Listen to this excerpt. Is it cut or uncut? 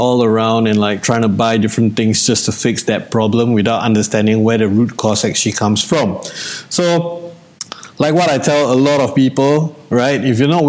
uncut